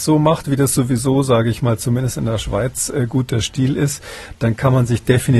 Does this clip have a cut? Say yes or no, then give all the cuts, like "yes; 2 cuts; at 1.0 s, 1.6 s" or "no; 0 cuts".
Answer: no; 0 cuts